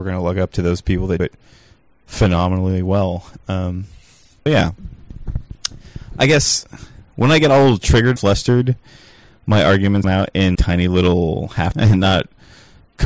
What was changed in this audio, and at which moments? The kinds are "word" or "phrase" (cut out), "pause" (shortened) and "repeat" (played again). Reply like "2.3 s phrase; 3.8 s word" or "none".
1.2 s word; 4.5 s word; 8.2 s word; 10.0 s word; 10.5 s word; 11.7 s word